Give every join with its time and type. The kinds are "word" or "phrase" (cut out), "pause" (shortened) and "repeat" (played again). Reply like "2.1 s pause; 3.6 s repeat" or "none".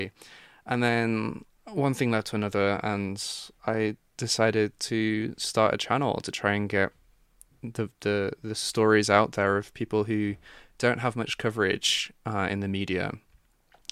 none